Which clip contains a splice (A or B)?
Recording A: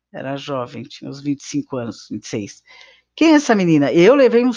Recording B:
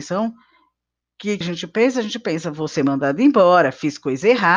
B